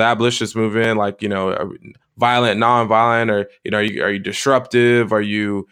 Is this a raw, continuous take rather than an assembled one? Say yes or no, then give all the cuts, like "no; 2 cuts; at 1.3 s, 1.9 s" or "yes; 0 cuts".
yes; 0 cuts